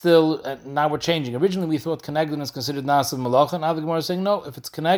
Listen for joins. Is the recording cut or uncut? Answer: uncut